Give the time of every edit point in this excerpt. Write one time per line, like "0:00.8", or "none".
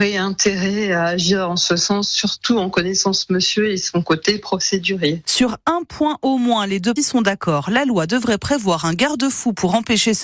0:07.0